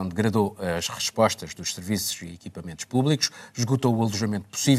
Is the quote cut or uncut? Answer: uncut